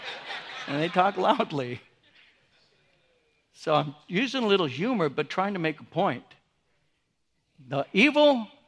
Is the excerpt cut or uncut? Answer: uncut